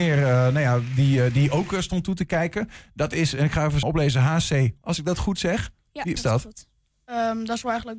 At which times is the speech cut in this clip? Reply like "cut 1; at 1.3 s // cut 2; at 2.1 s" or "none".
cut 1; at 3.8 s // cut 2; at 4.8 s // cut 3; at 6.2 s // cut 4; at 6.9 s